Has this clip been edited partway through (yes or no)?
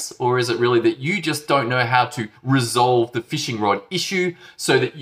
yes